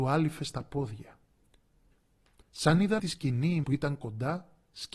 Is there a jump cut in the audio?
yes; 2 cuts; at 3.0 s, 3.6 s

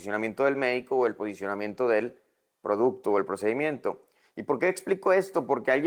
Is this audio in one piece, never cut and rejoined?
yes; 0 cuts

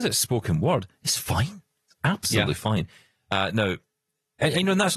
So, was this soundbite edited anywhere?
no; 0 cuts

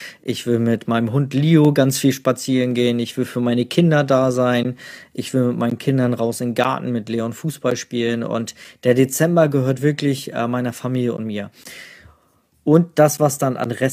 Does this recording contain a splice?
no; 0 cuts

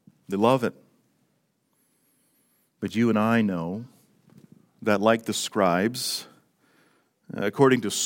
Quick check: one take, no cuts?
yes; 0 cuts

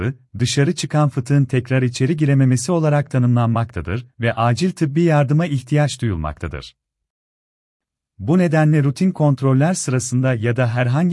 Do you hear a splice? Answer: no; 0 cuts

